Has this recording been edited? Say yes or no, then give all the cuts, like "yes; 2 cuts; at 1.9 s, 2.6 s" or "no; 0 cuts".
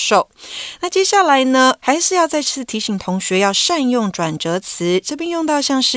yes; 1 cut; at 1.8 s